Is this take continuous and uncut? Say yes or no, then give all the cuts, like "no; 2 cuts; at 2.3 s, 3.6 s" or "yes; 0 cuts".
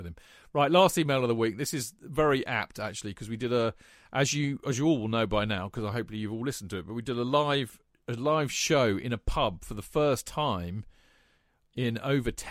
yes; 0 cuts